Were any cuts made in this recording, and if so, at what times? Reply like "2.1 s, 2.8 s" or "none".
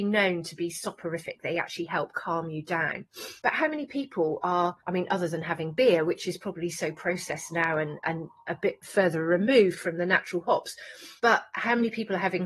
3.4 s, 4.8 s, 11.2 s